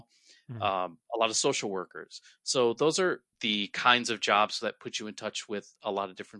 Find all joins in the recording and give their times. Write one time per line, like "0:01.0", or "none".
0:03.3